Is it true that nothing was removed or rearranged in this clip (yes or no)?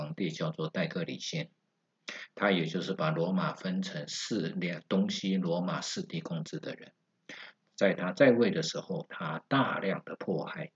yes